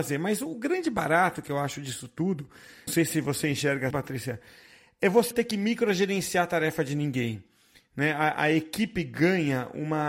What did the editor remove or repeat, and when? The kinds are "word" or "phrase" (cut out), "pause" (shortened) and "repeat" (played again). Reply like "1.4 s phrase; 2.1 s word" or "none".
2.9 s word; 3.9 s word; 5.3 s word